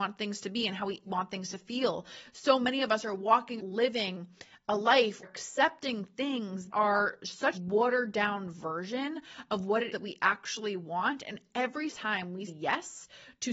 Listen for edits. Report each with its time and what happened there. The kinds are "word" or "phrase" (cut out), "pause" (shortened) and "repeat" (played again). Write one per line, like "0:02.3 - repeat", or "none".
0:01.1 - word
0:03.6 - word
0:05.2 - word
0:06.7 - word
0:07.5 - word
0:09.9 - word
0:11.9 - word
0:12.5 - word